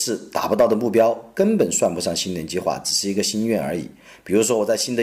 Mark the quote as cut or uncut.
uncut